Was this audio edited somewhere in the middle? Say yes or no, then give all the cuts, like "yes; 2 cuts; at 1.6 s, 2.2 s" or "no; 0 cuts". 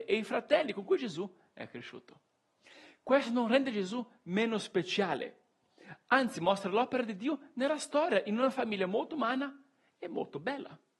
no; 0 cuts